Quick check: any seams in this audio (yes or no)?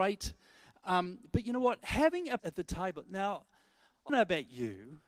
yes